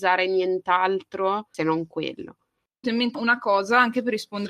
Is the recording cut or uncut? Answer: cut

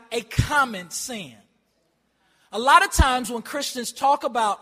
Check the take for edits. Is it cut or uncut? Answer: uncut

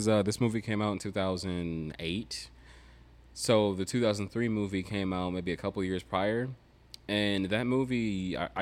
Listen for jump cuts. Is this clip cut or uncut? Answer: uncut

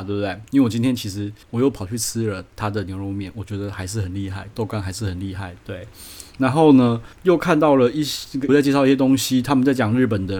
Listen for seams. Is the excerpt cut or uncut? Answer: cut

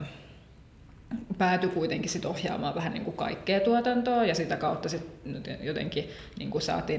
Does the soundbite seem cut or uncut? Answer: uncut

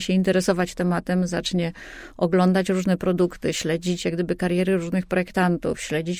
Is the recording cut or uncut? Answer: uncut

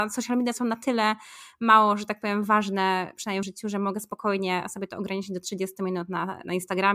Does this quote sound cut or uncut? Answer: cut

